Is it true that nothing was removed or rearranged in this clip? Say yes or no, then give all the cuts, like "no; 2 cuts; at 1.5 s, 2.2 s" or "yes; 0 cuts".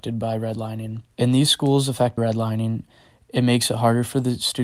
no; 2 cuts; at 1.1 s, 2.2 s